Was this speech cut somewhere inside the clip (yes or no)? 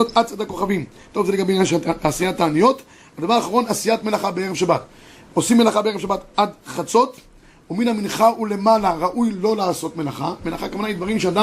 no